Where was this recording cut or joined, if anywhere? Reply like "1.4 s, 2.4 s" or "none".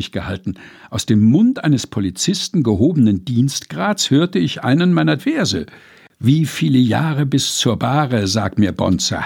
5.2 s